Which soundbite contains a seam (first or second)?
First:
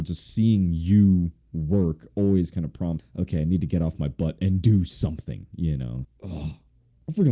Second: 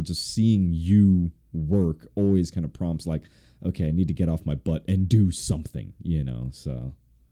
first